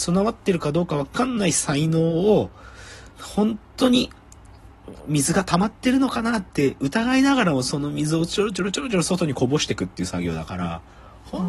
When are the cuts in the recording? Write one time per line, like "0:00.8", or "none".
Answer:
0:03.1

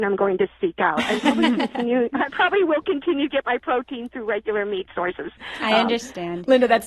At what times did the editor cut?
none

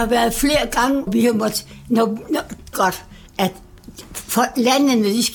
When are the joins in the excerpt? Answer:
0:01.1
0:02.7

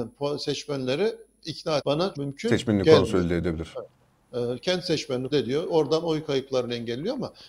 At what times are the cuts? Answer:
0:01.8
0:02.1
0:05.3

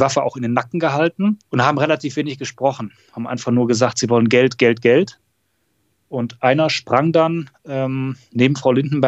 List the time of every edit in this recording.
0:01.4

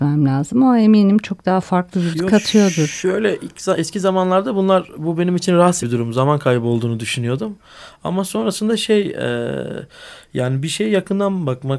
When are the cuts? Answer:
0:02.1
0:05.8

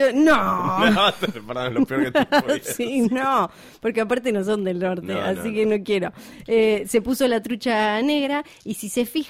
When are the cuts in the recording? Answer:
none

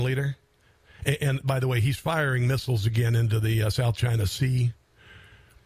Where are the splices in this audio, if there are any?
none

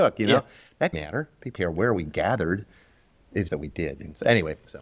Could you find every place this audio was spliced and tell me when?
0:00.9
0:01.6
0:03.5

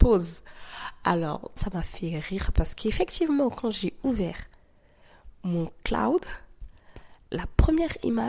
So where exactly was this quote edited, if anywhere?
0:01.6

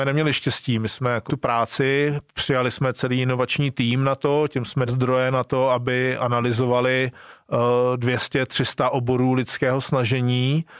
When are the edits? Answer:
0:01.3
0:04.9

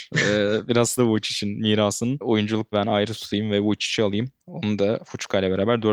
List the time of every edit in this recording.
0:01.0
0:02.7

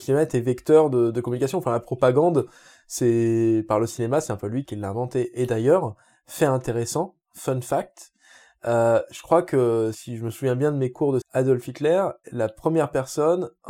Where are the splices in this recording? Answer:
0:04.6
0:09.9
0:11.2
0:12.2

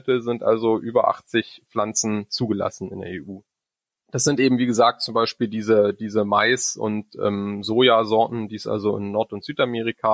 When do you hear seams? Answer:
none

